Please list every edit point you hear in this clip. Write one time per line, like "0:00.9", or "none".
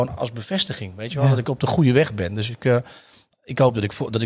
none